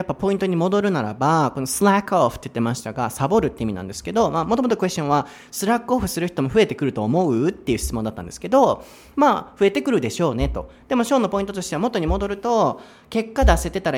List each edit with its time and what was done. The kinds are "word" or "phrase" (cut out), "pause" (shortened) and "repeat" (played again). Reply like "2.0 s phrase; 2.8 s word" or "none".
none